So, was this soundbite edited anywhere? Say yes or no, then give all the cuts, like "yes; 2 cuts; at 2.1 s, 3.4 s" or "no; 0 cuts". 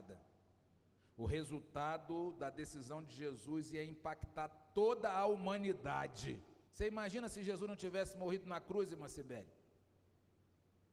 yes; 1 cut; at 6.7 s